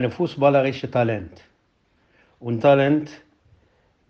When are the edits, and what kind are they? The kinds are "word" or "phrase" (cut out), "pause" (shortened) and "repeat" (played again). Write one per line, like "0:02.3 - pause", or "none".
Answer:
0:02.6 - word